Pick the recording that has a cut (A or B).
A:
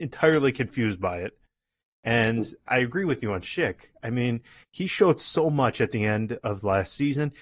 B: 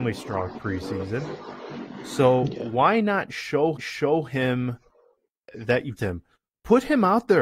B